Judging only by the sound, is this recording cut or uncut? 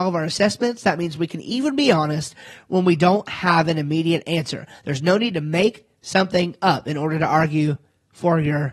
uncut